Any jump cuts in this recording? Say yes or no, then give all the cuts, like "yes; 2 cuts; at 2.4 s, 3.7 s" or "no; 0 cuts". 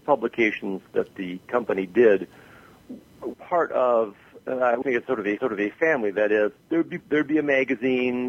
yes; 5 cuts; at 3.3 s, 4.8 s, 5.4 s, 6.6 s, 7.0 s